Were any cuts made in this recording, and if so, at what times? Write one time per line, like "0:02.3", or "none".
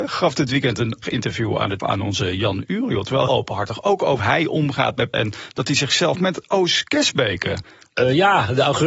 0:01.0
0:01.8
0:03.3
0:04.2
0:05.1
0:06.1